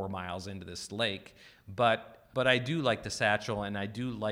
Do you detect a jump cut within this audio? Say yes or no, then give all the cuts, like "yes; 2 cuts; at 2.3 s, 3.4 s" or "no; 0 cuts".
yes; 1 cut; at 2.3 s